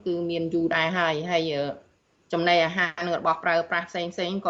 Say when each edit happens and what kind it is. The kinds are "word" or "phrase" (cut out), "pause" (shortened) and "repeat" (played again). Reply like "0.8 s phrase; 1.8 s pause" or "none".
none